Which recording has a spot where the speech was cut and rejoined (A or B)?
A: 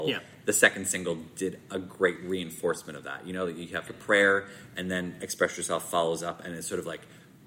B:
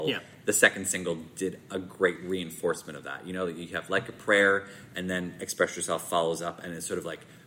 A